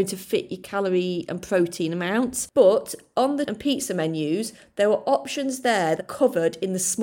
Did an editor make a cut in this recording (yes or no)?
yes